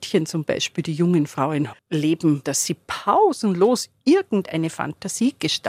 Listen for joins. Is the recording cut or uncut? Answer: cut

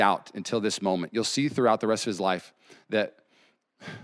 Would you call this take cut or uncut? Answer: uncut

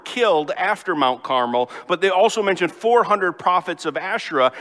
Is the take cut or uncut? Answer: uncut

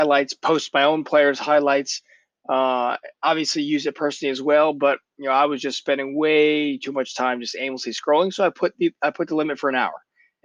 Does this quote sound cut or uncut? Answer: uncut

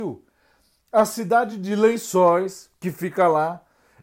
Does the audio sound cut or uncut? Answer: uncut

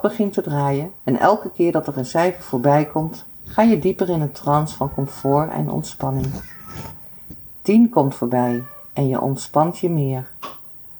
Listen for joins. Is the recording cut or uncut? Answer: cut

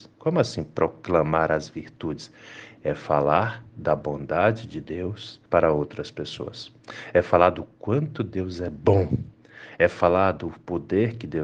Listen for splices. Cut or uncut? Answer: cut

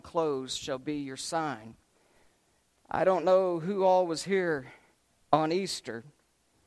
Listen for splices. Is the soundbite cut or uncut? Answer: uncut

